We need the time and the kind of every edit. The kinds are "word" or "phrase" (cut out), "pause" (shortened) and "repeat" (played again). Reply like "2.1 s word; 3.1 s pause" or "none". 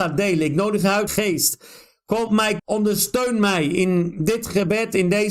1.1 s word; 2.3 s word; 2.6 s phrase